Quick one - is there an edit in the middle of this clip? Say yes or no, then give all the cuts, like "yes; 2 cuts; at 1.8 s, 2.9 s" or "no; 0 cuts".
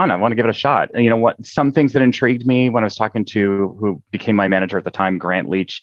no; 0 cuts